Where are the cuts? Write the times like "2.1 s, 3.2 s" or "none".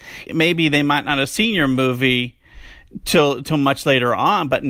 none

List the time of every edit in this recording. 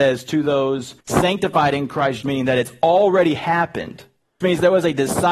1.0 s, 2.2 s, 4.4 s

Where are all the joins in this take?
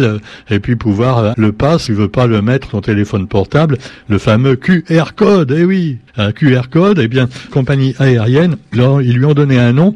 1.3 s, 1.9 s, 2.7 s, 6.1 s, 7.5 s, 8.7 s

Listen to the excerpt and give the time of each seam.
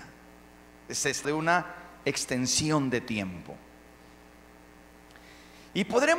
1.2 s

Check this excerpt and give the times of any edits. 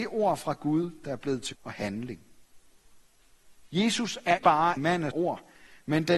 1.5 s, 4.4 s, 4.8 s, 5.1 s

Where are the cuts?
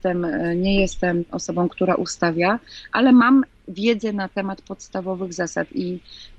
none

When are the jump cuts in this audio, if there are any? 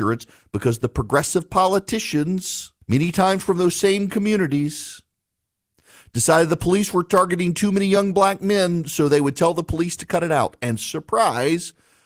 2.8 s

